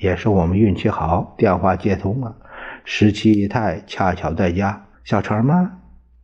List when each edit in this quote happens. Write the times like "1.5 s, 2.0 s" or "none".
4.9 s